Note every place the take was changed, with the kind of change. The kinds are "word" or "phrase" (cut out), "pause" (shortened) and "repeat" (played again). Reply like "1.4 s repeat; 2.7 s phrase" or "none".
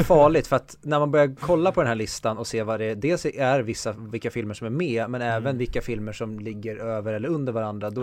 none

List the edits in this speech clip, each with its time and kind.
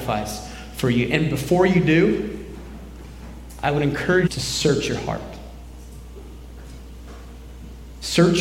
4.3 s word

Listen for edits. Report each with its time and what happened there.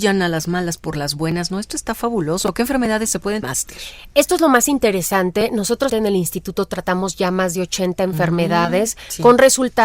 3.4 s phrase; 5.9 s word

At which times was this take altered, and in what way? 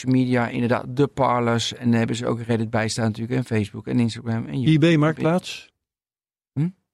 none

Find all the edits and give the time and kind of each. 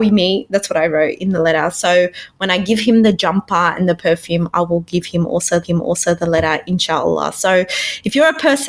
5.6 s repeat

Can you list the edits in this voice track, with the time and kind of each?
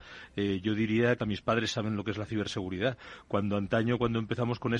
1.2 s phrase

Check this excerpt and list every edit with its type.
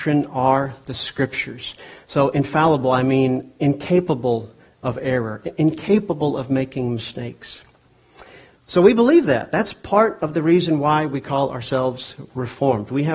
none

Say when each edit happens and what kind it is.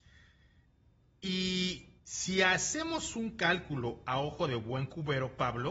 2.0 s pause

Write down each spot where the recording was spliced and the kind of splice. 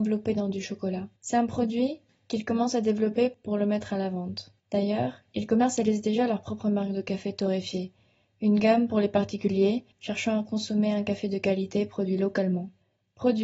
1.2 s pause; 4.6 s pause; 9.9 s pause

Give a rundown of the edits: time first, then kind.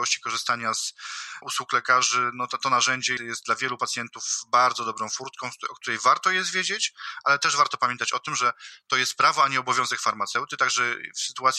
1.4 s word; 3.2 s word

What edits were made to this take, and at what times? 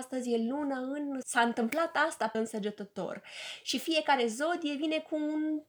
1.2 s phrase; 2.3 s word

